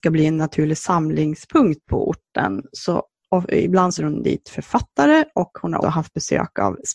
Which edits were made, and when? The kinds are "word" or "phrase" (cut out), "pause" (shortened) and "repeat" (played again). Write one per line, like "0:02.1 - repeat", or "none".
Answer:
0:04.0 - word
0:05.8 - word